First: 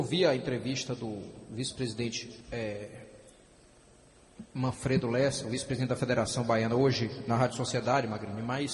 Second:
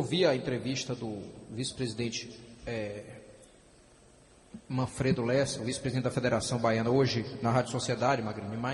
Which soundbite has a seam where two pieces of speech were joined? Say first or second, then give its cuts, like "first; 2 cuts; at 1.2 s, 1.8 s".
first; 1 cut; at 2.4 s